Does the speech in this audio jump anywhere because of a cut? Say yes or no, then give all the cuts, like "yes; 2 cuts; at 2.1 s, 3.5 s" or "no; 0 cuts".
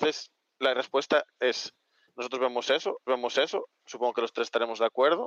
yes; 1 cut; at 3.1 s